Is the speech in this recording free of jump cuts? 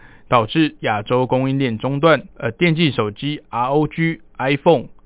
no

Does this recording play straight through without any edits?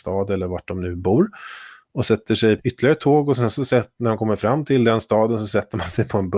no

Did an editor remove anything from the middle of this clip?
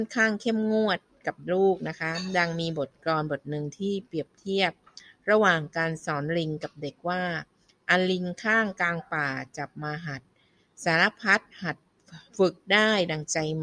yes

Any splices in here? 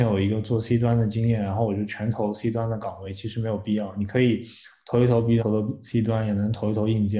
yes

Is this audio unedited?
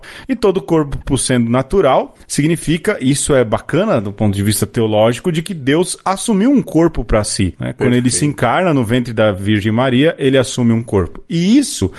yes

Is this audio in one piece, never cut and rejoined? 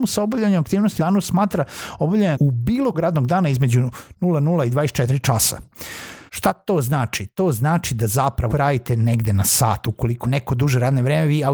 no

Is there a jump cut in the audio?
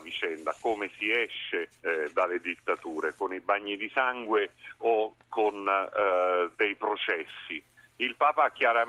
yes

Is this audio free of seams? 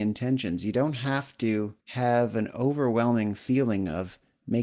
no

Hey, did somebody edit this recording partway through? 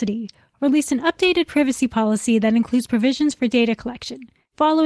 no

